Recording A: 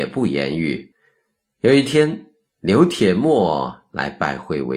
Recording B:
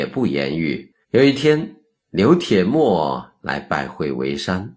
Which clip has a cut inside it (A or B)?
B